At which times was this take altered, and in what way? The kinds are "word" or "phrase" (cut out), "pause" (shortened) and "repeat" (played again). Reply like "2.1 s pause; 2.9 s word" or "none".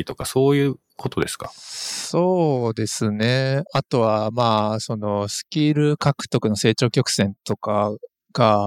3.7 s pause